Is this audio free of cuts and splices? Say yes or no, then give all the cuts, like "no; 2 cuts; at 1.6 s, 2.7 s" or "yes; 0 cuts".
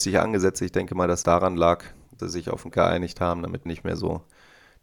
no; 4 cuts; at 1.2 s, 2.2 s, 2.7 s, 3.7 s